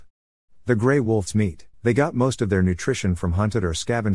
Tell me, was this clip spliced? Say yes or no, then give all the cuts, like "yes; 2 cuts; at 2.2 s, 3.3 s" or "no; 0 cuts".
yes; 2 cuts; at 1.3 s, 1.7 s